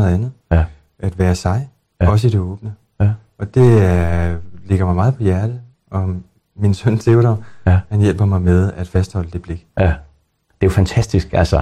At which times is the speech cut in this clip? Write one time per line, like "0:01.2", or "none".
none